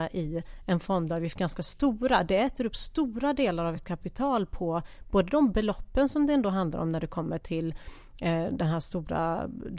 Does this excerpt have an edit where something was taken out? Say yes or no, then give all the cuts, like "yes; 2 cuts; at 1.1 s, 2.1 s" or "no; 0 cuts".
no; 0 cuts